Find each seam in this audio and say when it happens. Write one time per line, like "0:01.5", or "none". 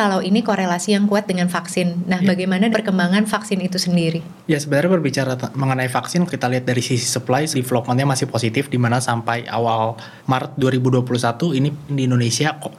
0:02.7
0:04.4
0:06.3
0:07.5
0:10.2
0:11.9